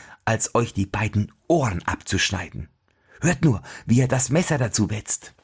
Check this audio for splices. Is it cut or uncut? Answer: uncut